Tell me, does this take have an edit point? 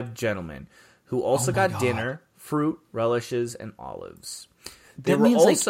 no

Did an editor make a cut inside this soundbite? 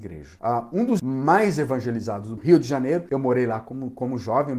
yes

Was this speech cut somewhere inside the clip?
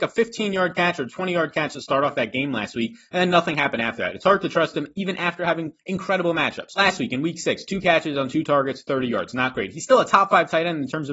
no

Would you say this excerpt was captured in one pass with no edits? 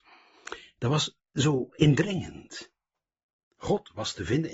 no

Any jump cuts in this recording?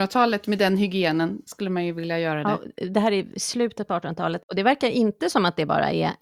no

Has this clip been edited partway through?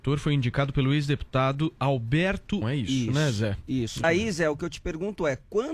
yes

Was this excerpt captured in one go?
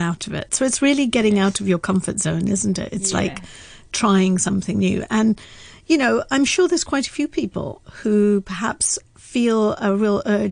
yes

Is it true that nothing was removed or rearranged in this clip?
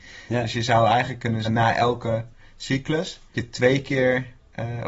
no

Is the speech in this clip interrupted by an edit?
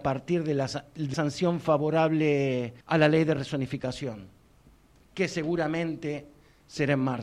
yes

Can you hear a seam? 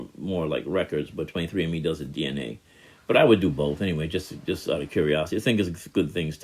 no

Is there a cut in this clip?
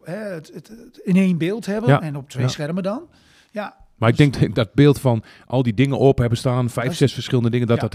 no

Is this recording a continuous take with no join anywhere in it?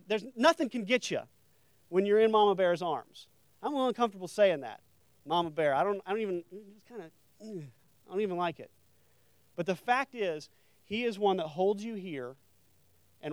yes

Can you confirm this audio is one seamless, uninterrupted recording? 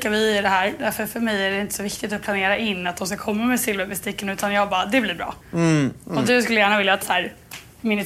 no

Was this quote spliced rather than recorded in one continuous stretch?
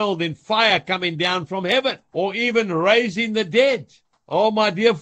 no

